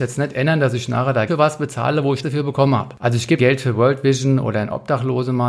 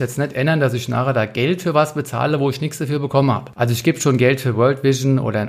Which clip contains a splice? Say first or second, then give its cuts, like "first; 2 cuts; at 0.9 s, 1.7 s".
first; 3 cuts; at 1.3 s, 2.2 s, 3.4 s